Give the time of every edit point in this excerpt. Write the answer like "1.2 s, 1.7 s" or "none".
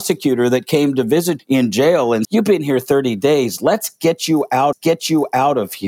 1.4 s, 2.2 s, 4.7 s